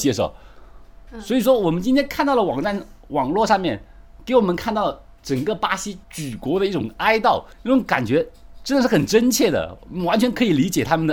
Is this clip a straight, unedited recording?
no; 2 cuts; at 6.0 s, 7.5 s

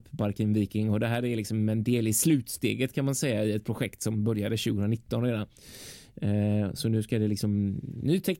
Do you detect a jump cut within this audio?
no; 0 cuts

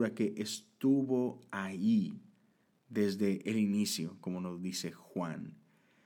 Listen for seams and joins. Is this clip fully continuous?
yes; 0 cuts

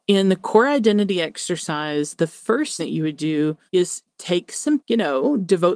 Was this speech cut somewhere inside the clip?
yes; 3 cuts; at 2.8 s, 3.7 s, 4.8 s

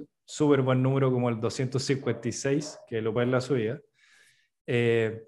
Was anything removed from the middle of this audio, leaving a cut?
yes; 1 cut; at 3.2 s

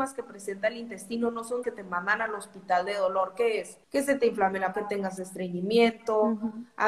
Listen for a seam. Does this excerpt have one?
yes; 3 cuts; at 1.6 s, 3.8 s, 4.7 s

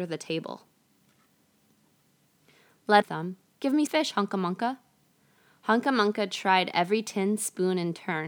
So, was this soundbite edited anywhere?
yes; 2 cuts; at 3.0 s, 3.9 s

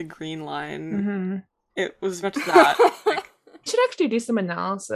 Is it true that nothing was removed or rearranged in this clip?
no; 2 cuts; at 2.2 s, 3.7 s

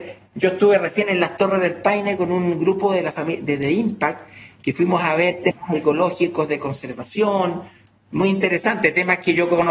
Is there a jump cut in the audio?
no; 0 cuts

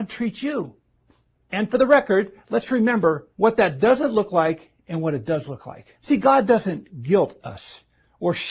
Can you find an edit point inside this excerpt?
yes; 2 cuts; at 3.3 s, 5.9 s

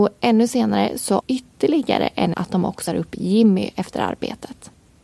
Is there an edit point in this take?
yes; 3 cuts; at 1.2 s, 2.3 s, 2.9 s

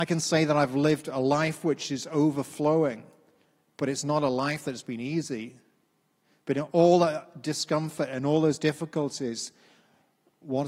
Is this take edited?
no; 0 cuts

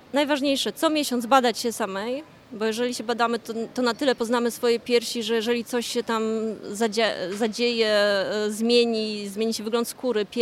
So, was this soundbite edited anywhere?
no; 0 cuts

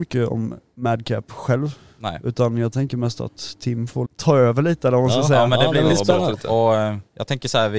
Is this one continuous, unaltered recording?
no; 1 cut; at 4.1 s

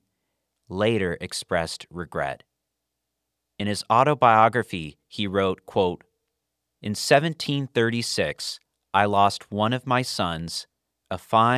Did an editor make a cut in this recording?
no; 0 cuts

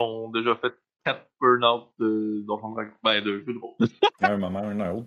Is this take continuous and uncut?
yes; 0 cuts

